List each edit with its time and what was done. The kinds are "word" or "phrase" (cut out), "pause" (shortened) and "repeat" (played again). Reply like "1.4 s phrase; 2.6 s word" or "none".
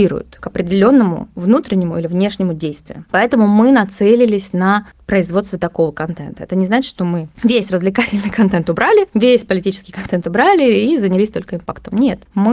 none